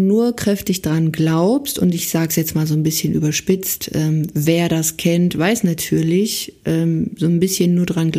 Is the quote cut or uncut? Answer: uncut